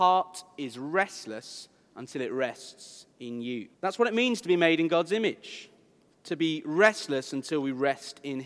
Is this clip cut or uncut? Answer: cut